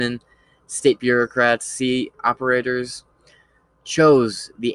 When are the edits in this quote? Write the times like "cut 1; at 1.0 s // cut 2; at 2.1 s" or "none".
cut 1; at 1.0 s // cut 2; at 2.1 s